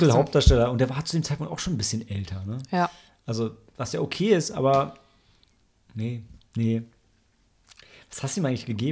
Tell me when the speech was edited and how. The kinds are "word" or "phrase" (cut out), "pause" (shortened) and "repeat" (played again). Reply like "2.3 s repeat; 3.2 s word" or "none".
none